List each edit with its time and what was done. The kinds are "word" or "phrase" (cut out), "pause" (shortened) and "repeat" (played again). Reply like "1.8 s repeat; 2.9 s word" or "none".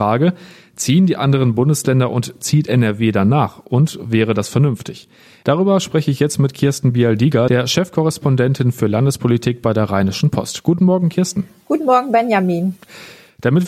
none